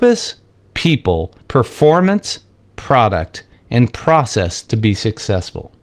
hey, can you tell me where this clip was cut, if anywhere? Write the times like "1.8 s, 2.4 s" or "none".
1.4 s